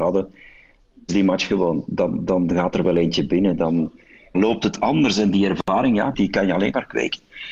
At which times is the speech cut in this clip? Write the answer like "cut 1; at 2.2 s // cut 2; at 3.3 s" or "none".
cut 1; at 1.1 s // cut 2; at 4.3 s // cut 3; at 6.1 s